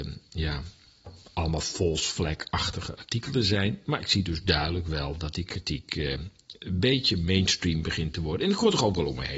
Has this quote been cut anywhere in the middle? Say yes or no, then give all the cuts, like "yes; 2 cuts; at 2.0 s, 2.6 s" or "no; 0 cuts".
no; 0 cuts